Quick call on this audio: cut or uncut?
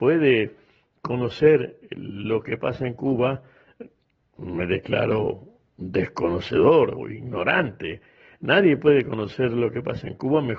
cut